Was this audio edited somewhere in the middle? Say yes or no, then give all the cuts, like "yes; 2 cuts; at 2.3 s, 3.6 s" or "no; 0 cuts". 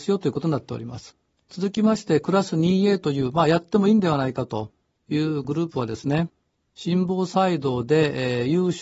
yes; 1 cut; at 1.3 s